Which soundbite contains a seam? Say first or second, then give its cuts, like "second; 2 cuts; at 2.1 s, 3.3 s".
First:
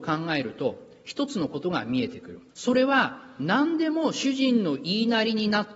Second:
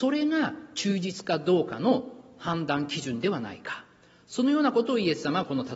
first; 1 cut; at 2.5 s